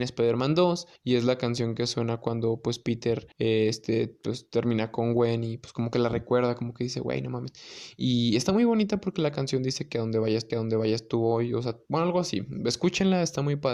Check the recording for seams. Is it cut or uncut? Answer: cut